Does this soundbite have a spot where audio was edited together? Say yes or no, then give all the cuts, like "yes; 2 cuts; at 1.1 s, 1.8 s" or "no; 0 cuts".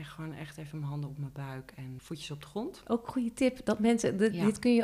yes; 1 cut; at 2.0 s